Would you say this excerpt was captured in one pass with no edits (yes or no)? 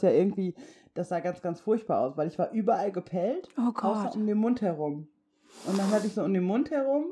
yes